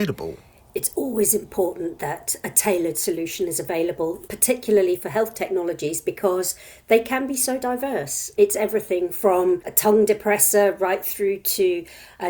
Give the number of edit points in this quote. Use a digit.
0